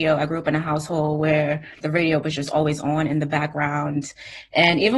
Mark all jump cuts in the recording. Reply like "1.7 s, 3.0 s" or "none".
1.8 s